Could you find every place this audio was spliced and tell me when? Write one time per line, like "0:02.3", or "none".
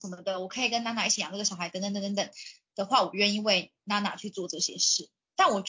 none

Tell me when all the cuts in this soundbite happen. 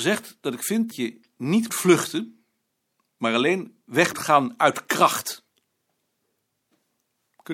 0:00.9
0:01.7
0:04.1

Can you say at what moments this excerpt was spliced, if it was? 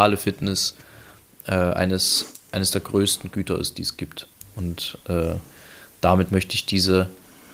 none

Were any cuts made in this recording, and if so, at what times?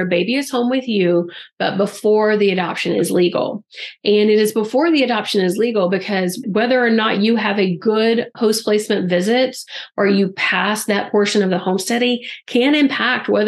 0:06.4
0:08.3

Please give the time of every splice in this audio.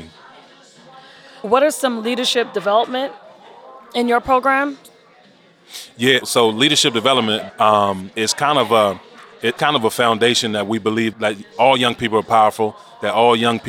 0:01.4
0:06.2
0:07.5
0:08.1
0:09.6
0:11.1

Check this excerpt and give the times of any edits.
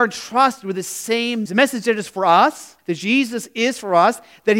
0:01.5
0:02.8

